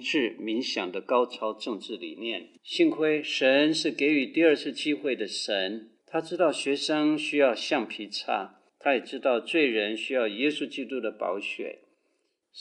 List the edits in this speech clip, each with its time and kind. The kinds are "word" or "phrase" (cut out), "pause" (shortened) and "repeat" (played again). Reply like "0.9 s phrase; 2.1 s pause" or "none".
2.6 s pause; 6.0 s pause; 8.7 s pause